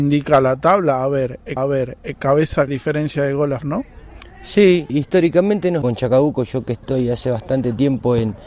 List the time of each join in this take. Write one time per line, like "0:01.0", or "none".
0:01.6
0:02.7
0:03.6
0:04.9
0:05.8